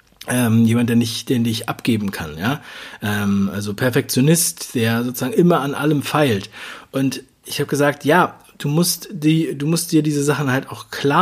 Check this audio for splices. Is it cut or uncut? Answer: uncut